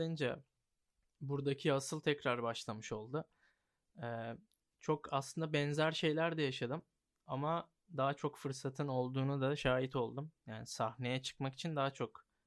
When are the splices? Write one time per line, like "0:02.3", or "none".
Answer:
none